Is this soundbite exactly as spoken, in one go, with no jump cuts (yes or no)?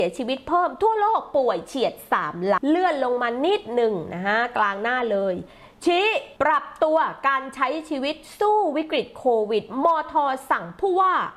no